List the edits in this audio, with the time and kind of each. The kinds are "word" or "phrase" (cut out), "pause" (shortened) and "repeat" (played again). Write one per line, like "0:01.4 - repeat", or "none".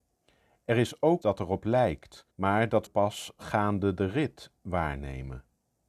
0:01.2 - word
0:02.3 - pause
0:02.9 - word